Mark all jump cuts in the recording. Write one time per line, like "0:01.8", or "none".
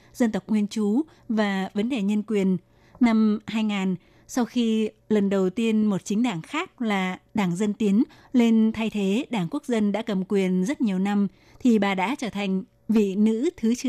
none